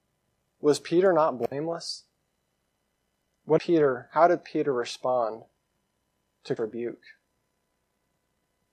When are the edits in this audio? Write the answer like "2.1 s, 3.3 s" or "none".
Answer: 3.6 s, 6.6 s